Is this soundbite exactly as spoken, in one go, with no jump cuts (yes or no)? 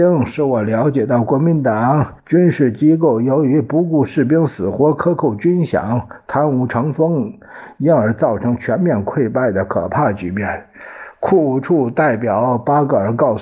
no